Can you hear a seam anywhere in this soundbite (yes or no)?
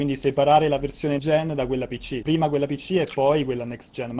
yes